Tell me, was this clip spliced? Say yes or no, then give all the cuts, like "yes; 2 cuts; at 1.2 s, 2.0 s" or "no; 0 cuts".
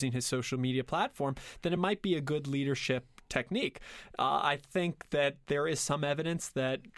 no; 0 cuts